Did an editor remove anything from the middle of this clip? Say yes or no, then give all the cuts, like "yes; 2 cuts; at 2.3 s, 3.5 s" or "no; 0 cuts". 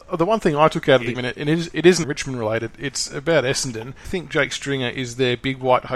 yes; 3 cuts; at 1.1 s, 2.0 s, 4.0 s